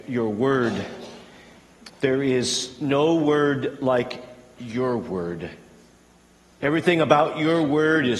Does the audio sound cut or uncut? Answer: uncut